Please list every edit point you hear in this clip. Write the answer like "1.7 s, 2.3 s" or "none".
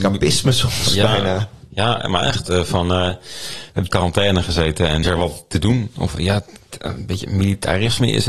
3.9 s, 5.0 s

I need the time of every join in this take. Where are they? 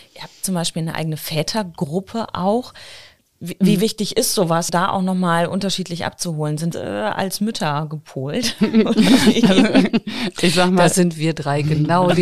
3.2 s, 4.7 s, 6.7 s

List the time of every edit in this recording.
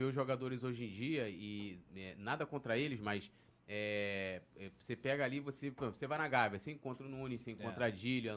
none

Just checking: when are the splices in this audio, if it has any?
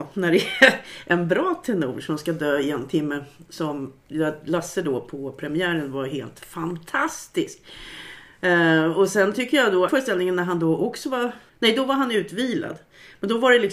9.9 s, 11.5 s

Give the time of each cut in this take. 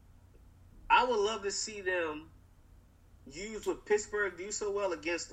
none

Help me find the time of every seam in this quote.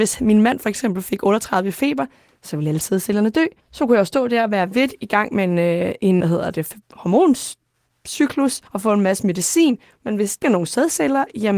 3.6 s, 6.2 s, 6.8 s, 8.7 s, 10.4 s

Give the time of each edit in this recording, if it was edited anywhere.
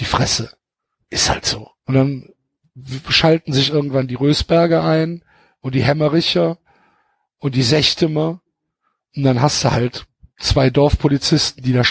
1.8 s

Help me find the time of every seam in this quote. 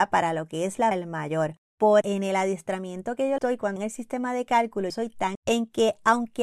0.9 s, 2.0 s, 3.4 s, 3.8 s, 4.9 s, 5.3 s

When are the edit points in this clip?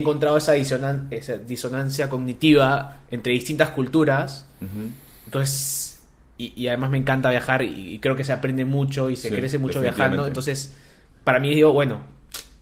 none

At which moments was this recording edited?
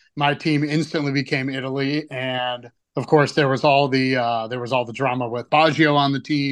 2.8 s, 5.5 s

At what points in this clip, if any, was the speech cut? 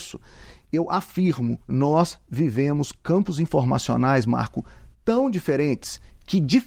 1.6 s

